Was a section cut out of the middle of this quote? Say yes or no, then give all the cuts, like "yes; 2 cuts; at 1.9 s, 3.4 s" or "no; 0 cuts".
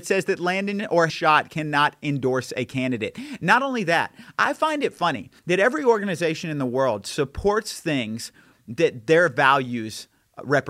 yes; 2 cuts; at 1.1 s, 5.4 s